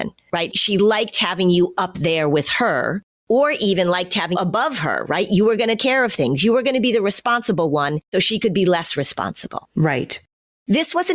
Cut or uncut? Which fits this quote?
cut